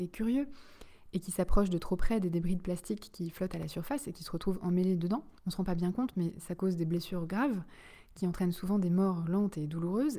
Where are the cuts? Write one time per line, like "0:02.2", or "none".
0:05.4